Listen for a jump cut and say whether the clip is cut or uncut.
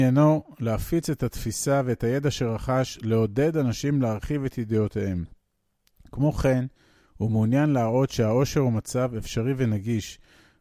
uncut